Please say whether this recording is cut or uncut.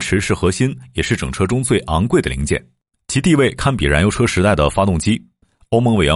uncut